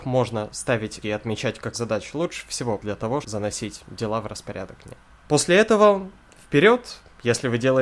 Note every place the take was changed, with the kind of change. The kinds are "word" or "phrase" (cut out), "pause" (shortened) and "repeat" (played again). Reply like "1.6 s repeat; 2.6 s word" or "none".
1.0 s word; 1.7 s word; 2.8 s word; 3.2 s word